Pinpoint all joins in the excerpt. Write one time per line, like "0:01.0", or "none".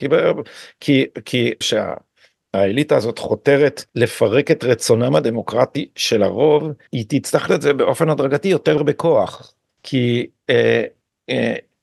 0:01.6
0:03.9
0:06.9
0:07.5
0:08.8
0:09.7